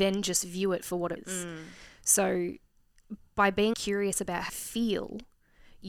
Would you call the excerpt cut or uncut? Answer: cut